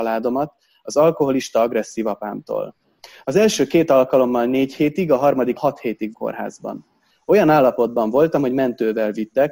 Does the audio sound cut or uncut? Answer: cut